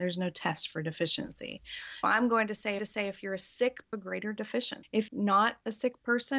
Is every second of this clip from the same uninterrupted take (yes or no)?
no